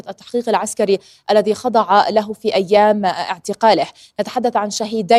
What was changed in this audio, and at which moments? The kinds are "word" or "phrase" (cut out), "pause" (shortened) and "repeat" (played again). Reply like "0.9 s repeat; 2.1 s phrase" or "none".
none